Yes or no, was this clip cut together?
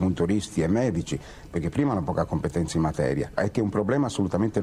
no